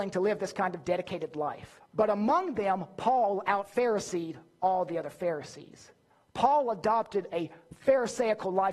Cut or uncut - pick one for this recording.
cut